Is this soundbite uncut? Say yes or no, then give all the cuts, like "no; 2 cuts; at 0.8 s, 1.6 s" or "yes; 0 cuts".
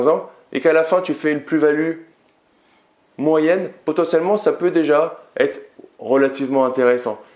yes; 0 cuts